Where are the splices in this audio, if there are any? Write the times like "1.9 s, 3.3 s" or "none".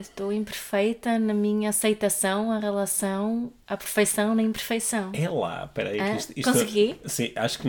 none